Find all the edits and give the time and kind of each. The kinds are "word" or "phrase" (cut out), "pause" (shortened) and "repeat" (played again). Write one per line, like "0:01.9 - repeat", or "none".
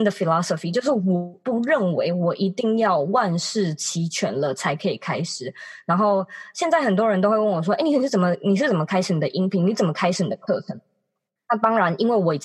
none